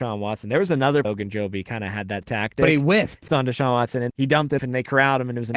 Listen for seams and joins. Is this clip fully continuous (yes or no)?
no